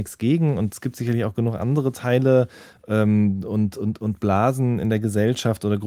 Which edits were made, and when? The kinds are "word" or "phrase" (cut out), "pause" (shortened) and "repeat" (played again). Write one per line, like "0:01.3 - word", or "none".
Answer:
none